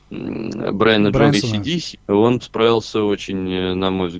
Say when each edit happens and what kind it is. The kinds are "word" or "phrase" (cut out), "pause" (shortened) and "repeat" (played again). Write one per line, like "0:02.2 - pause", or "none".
0:01.3 - word
0:01.9 - word
0:02.4 - word